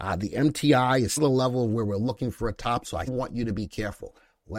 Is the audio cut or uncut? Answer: cut